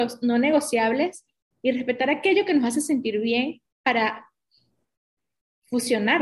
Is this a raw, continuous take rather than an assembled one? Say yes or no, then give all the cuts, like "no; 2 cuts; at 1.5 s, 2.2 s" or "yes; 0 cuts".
yes; 0 cuts